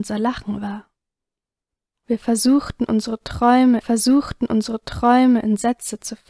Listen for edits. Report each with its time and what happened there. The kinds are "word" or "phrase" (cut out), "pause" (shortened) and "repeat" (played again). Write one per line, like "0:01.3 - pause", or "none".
0:03.8 - repeat

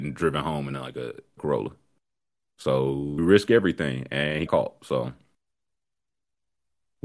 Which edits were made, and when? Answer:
0:01.4 - word
0:03.2 - word
0:04.5 - word

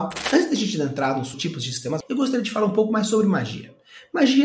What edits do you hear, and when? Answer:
0:01.3 - word
0:02.0 - word

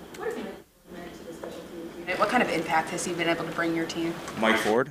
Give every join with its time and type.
none

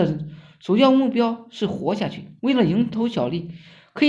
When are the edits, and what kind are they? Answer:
0:02.4 - pause

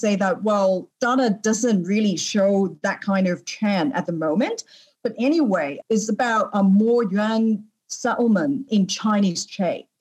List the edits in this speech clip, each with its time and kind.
none

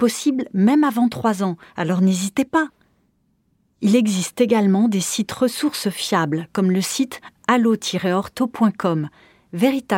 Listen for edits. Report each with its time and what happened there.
none

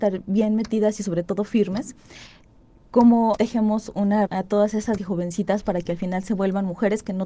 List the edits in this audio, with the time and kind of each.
0:03.4 - word
0:04.3 - phrase
0:05.0 - word

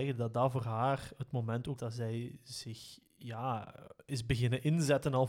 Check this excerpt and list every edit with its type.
0:01.8 - phrase

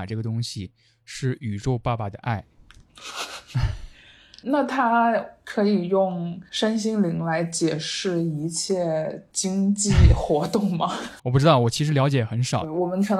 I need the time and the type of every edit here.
0:04.4 - word
0:11.2 - pause

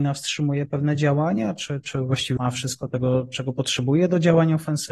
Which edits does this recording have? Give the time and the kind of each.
0:02.4 - word

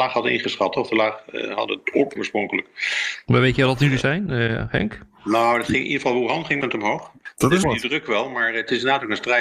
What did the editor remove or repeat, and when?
0:02.2 - word
0:04.0 - word
0:06.6 - word
0:07.6 - word

